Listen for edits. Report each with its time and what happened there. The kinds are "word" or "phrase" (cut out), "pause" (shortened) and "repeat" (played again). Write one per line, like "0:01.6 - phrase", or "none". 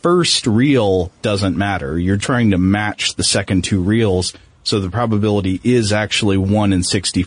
0:02.2 - word